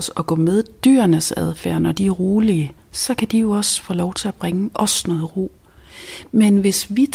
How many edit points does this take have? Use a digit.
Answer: 1